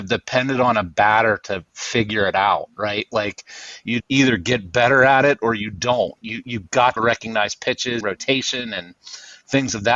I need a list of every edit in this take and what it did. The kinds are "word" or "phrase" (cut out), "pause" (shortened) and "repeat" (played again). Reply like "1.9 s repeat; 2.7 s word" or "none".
4.0 s word; 7.0 s phrase; 8.0 s word